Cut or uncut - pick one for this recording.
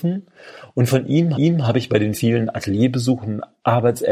cut